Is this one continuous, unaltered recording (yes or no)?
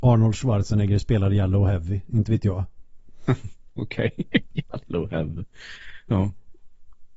yes